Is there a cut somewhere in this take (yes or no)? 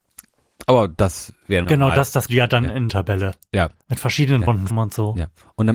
yes